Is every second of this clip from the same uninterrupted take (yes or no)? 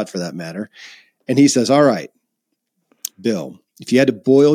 yes